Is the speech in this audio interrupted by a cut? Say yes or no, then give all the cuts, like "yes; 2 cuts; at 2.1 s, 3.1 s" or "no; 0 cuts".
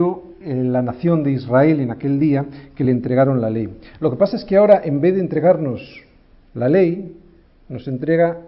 no; 0 cuts